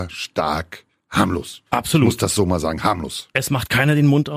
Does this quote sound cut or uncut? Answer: cut